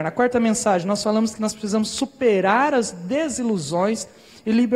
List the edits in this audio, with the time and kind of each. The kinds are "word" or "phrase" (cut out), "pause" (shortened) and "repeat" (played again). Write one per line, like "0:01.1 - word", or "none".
none